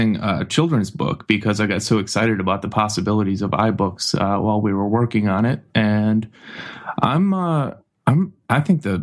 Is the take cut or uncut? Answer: uncut